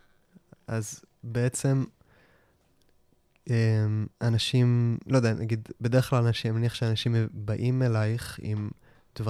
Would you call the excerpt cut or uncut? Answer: cut